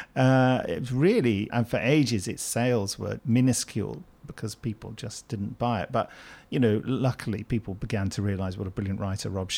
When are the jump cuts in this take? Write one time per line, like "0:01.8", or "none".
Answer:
0:01.5
0:03.2